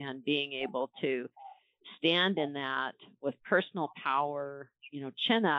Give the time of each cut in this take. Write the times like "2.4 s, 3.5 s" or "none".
none